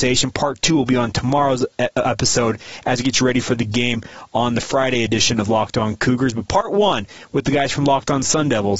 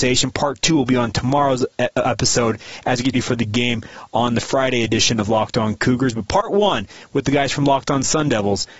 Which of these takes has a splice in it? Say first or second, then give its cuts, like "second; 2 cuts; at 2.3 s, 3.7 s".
second; 1 cut; at 3.1 s